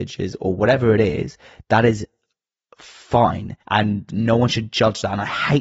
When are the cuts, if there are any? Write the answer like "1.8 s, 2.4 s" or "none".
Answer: 3.6 s